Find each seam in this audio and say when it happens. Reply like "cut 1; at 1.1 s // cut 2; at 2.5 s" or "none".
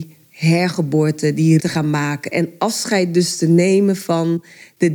cut 1; at 1.6 s